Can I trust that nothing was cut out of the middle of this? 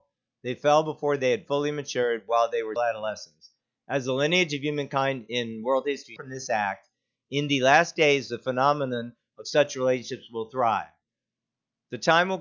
no; 2 cuts; at 2.8 s, 6.2 s

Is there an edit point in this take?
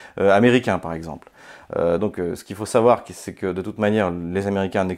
no; 0 cuts

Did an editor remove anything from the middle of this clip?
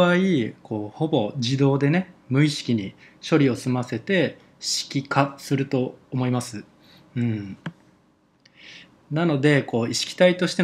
no; 0 cuts

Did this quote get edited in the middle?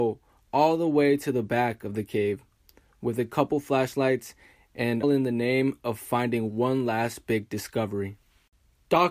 yes; 1 cut; at 5.0 s

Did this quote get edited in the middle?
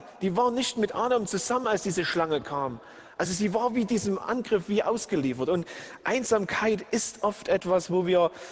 no; 0 cuts

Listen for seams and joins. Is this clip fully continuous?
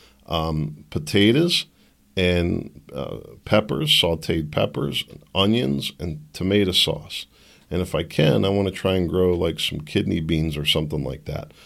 yes; 0 cuts

